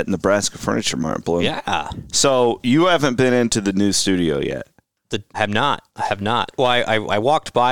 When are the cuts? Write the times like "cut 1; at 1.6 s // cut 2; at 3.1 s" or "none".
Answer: cut 1; at 5.3 s // cut 2; at 5.9 s